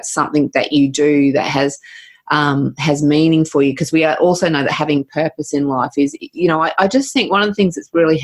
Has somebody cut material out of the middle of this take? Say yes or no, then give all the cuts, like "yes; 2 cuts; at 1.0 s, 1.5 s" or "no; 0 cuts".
no; 0 cuts